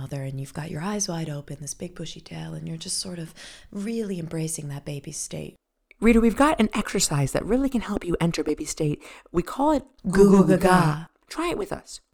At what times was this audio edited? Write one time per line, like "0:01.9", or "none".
none